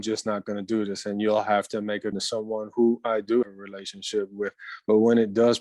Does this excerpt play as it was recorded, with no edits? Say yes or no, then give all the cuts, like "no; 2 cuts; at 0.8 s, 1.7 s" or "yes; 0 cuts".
no; 2 cuts; at 2.1 s, 3.4 s